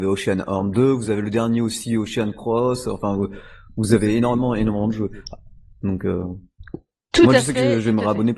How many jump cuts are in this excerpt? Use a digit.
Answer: 0